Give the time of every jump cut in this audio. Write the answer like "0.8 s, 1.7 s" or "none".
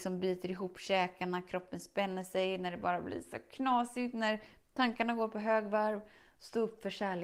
none